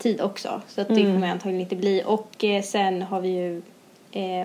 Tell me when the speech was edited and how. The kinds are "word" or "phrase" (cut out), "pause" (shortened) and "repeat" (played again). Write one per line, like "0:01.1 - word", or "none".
none